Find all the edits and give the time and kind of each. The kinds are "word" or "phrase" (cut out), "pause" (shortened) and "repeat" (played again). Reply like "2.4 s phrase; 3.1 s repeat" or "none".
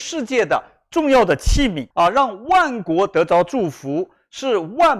1.9 s pause